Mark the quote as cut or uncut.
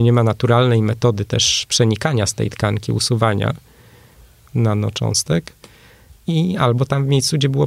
uncut